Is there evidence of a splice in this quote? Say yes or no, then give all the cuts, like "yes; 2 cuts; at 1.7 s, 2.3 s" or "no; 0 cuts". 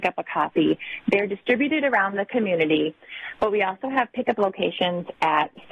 no; 0 cuts